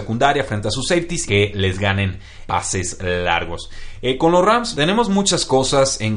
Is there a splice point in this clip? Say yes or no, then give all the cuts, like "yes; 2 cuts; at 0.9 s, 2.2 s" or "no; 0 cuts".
yes; 3 cuts; at 1.3 s, 2.5 s, 4.7 s